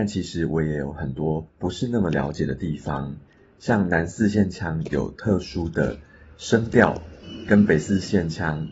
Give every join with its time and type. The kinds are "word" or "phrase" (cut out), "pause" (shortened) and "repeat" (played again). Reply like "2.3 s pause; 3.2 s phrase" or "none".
1.5 s pause